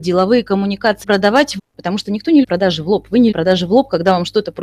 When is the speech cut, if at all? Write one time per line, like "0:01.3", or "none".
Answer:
0:01.0
0:01.6
0:02.4
0:03.3